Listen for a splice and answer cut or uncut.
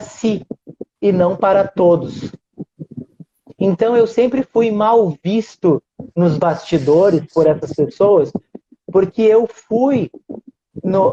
uncut